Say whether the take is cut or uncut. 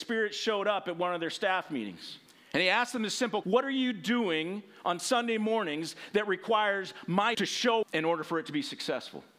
cut